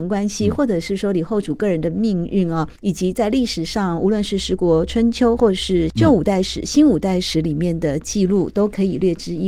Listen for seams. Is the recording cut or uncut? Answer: cut